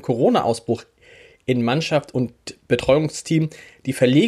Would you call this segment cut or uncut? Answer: uncut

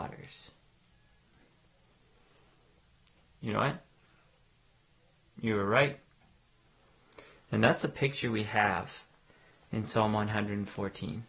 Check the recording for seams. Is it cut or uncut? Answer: uncut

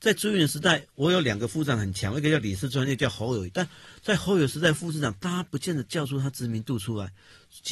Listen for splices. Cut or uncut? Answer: uncut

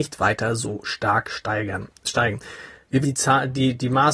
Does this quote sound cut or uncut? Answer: cut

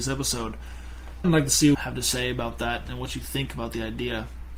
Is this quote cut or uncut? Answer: cut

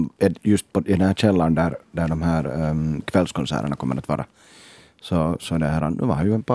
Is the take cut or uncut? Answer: uncut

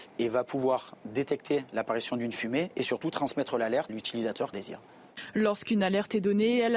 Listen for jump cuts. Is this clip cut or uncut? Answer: cut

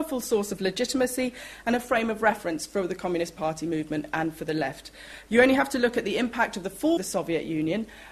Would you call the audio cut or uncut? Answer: cut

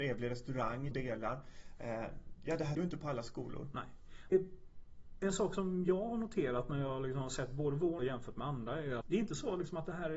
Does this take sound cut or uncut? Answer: cut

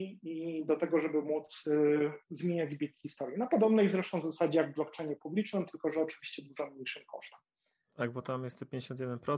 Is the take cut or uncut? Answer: uncut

